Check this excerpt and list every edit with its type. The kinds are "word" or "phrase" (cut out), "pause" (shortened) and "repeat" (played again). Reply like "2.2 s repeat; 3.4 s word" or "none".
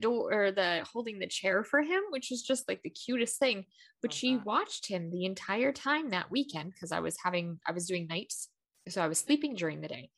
none